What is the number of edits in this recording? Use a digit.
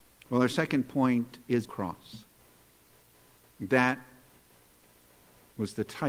1